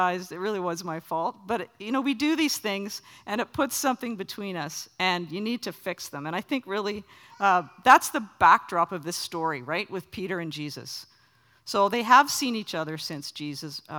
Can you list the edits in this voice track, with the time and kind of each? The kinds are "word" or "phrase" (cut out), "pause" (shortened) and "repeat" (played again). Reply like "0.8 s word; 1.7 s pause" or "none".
none